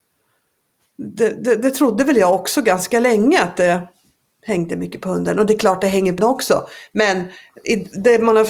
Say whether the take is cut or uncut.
cut